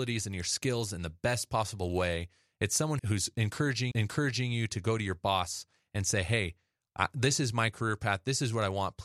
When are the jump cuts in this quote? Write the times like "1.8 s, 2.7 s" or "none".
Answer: 3.0 s, 3.9 s